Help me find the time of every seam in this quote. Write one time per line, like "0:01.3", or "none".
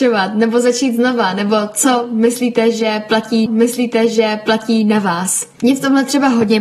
0:03.5
0:05.5